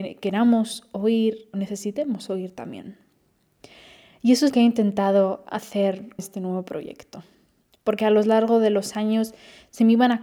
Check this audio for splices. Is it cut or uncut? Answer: cut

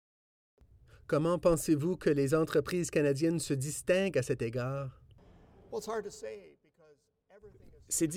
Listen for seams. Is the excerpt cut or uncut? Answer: uncut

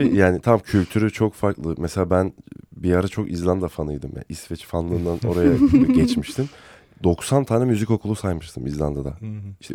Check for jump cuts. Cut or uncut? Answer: uncut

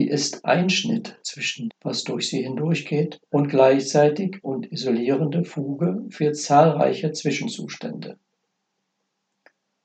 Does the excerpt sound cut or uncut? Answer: cut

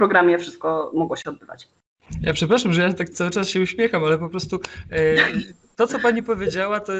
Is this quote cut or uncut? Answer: uncut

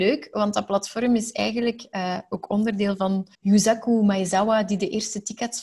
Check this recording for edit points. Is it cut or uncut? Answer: cut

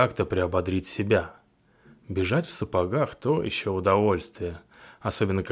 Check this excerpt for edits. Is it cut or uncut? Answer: uncut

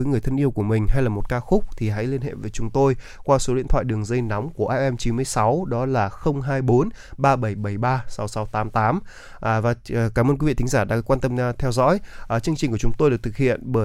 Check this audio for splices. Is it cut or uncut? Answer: uncut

